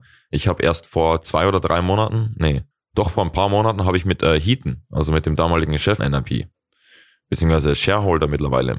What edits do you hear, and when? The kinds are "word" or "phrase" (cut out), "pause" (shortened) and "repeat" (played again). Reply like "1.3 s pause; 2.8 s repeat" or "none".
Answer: 2.7 s pause; 6.0 s word